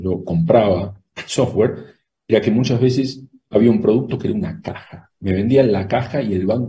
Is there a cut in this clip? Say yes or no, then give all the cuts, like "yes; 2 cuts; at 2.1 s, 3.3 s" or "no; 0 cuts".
yes; 1 cut; at 1.1 s